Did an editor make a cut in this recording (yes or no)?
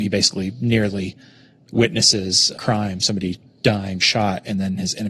yes